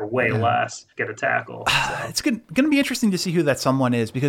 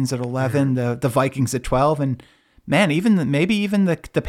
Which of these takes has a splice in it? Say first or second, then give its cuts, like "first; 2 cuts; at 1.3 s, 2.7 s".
first; 1 cut; at 0.9 s